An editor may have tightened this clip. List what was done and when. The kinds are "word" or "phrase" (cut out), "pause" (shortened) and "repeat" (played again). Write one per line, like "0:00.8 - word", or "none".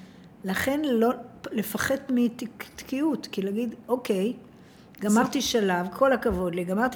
0:02.1 - word